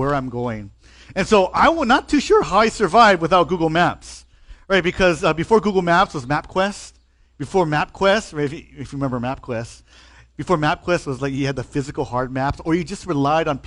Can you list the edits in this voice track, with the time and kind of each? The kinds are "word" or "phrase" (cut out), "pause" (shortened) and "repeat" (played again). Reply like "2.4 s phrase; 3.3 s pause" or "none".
none